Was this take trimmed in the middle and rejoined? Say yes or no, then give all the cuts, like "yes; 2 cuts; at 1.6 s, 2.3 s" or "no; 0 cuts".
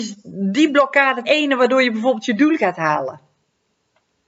yes; 1 cut; at 1.2 s